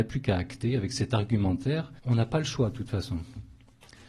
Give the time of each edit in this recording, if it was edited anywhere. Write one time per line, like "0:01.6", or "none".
0:02.0